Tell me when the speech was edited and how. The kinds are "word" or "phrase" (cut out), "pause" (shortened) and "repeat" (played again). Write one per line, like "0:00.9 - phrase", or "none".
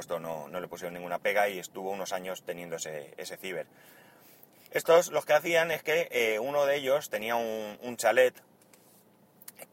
none